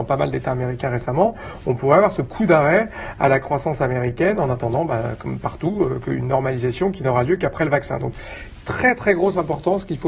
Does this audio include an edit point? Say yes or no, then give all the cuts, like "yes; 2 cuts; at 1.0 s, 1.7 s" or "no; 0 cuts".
no; 0 cuts